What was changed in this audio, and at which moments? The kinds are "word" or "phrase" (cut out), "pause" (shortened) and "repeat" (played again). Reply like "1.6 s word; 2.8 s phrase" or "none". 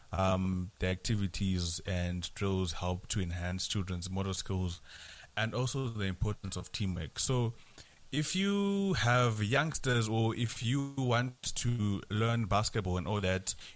none